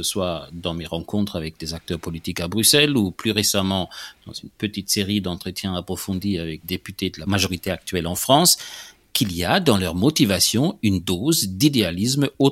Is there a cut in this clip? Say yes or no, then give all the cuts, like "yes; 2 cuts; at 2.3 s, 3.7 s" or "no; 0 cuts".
yes; 1 cut; at 6.6 s